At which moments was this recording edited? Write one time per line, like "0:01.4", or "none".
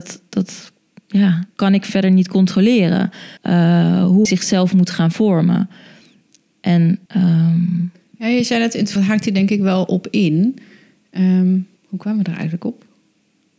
0:01.5
0:03.4
0:04.2
0:07.1
0:09.0
0:11.8